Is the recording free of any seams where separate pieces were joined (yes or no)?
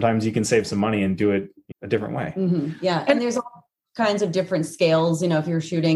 no